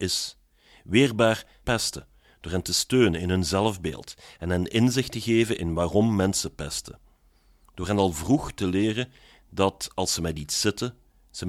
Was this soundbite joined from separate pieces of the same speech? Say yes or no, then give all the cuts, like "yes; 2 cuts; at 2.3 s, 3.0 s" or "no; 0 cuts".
yes; 1 cut; at 1.6 s